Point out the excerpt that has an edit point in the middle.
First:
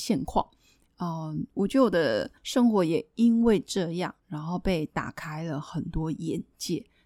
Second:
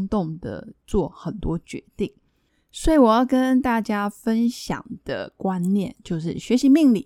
first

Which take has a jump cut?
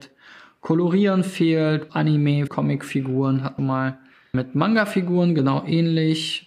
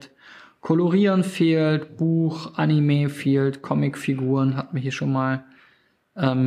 first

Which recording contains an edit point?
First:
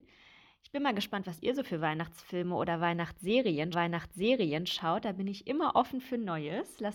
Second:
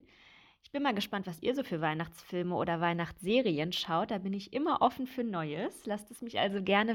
first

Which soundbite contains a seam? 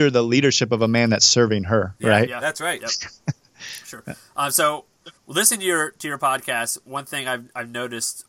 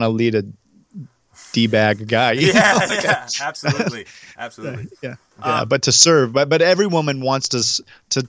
first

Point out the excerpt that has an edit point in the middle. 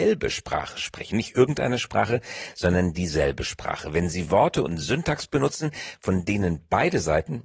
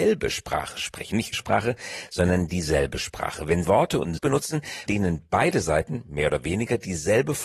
second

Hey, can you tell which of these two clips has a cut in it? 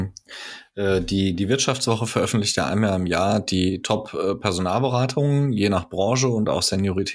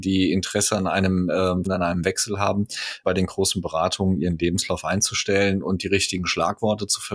second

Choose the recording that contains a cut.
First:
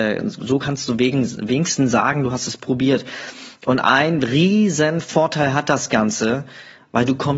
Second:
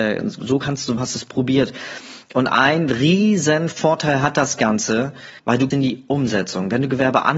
second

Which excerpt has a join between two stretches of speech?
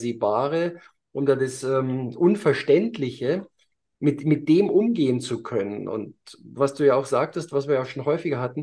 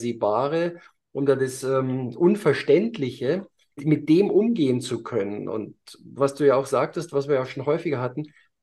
second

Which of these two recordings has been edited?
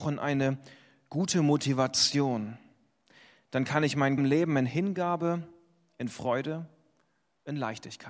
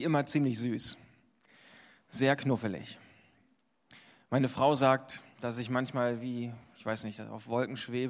first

